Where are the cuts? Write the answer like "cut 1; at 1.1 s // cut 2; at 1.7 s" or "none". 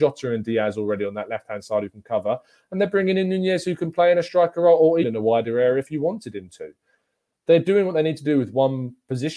cut 1; at 5.0 s

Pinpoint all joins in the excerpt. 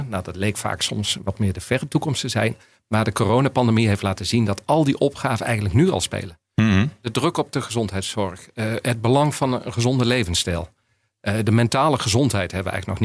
none

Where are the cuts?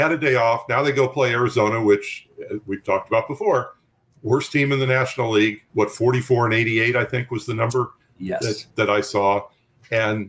none

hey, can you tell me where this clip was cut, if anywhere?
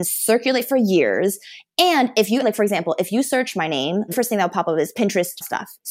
cut 1; at 2.4 s // cut 2; at 4.1 s

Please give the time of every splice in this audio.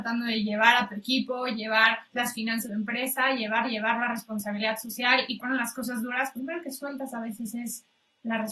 cut 1; at 2.7 s // cut 2; at 3.6 s // cut 3; at 5.4 s // cut 4; at 6.3 s

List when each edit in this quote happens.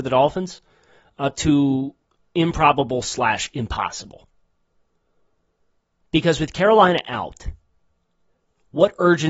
none

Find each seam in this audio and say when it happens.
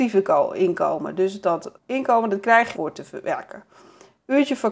cut 1; at 1.8 s // cut 2; at 2.7 s

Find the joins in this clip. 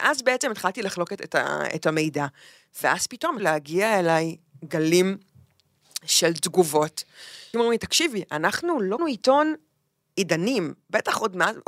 cut 1; at 3.4 s // cut 2; at 7.5 s // cut 3; at 9.0 s

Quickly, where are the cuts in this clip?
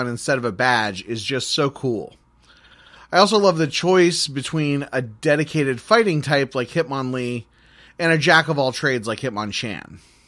none

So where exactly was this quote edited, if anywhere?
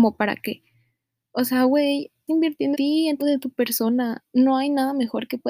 cut 1; at 2.3 s // cut 2; at 2.7 s // cut 3; at 3.2 s

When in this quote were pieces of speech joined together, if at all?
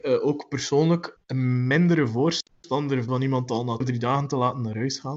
cut 1; at 1.2 s // cut 2; at 3.1 s // cut 3; at 3.8 s

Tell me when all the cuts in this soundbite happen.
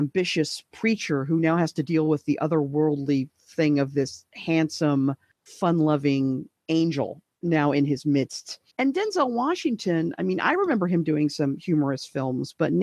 cut 1; at 8.7 s

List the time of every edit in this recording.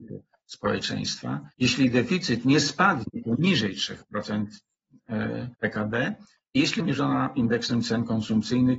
cut 1; at 1.5 s // cut 2; at 5.5 s // cut 3; at 6.8 s

